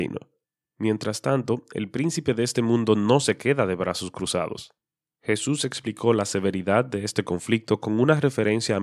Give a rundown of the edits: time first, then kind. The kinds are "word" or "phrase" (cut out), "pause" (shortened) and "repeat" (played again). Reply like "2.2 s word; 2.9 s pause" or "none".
none